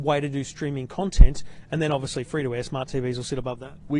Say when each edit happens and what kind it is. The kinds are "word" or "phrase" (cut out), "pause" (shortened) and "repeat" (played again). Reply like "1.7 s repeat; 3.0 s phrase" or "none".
none